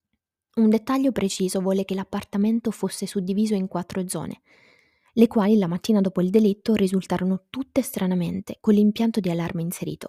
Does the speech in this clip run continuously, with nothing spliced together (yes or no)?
yes